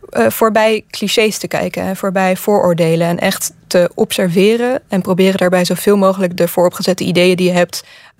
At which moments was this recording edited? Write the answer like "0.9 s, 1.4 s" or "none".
6.4 s